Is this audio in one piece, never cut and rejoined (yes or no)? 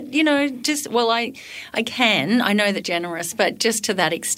no